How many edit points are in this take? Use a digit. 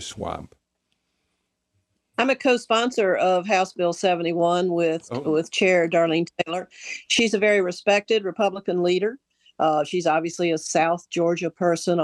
0